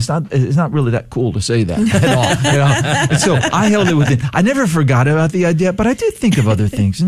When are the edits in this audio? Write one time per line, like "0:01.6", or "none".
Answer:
none